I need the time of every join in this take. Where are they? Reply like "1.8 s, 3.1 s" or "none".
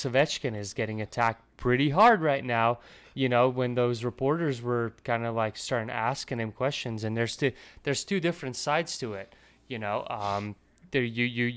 none